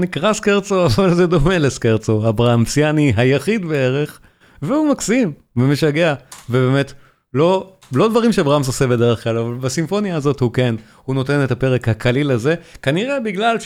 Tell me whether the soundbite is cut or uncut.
uncut